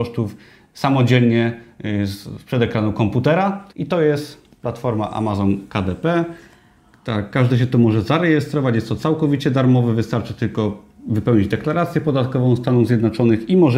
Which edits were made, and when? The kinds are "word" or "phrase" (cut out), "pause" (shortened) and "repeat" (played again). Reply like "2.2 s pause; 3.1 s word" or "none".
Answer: 3.7 s pause